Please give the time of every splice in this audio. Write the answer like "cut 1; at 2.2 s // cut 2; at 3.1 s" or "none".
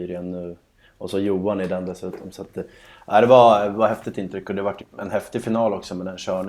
cut 1; at 4.8 s